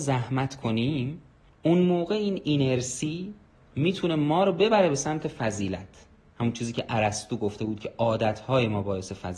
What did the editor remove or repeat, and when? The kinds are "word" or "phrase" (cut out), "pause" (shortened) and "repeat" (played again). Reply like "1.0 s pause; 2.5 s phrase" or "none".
none

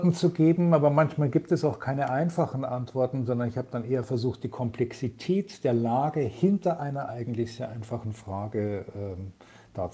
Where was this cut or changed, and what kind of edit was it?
none

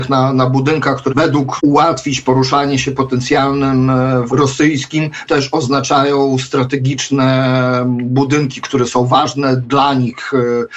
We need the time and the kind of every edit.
1.1 s word; 1.6 s word; 4.3 s word; 5.3 s word

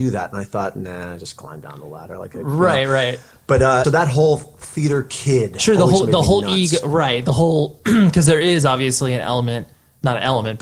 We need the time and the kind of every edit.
3.8 s word

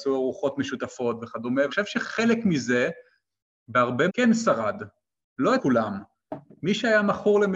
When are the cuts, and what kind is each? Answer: 1.7 s word; 4.1 s word; 5.6 s word

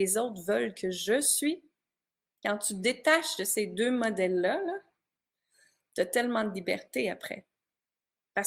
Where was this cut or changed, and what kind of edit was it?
none

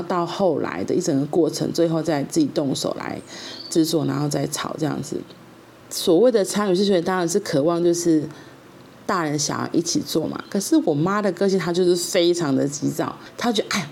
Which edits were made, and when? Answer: 5.5 s pause

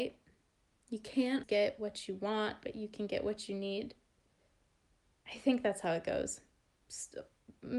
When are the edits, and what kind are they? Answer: 1.4 s word

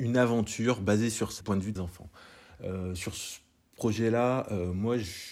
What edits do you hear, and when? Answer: 1.4 s phrase; 1.8 s word

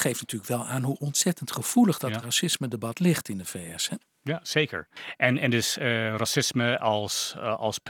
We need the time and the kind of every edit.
none

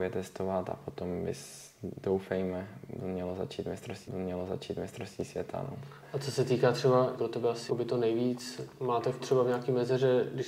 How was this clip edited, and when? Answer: 4.1 s repeat; 7.2 s phrase; 7.7 s word; 9.2 s word

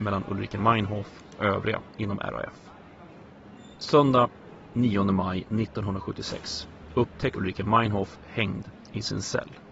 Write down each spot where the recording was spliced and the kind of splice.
1.4 s word; 3.7 s pause; 7.3 s word

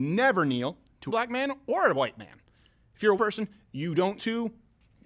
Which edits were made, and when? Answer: 1.1 s word; 3.2 s word; 4.2 s word

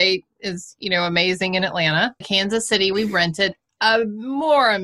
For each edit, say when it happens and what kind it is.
2.2 s word; 2.9 s word

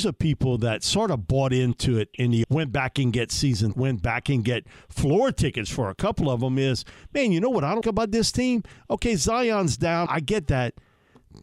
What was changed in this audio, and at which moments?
2.4 s word; 3.7 s word; 7.8 s word; 10.1 s word

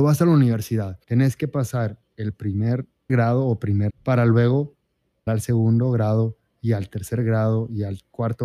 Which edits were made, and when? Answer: 1.0 s pause; 3.1 s word; 3.9 s word; 5.3 s word

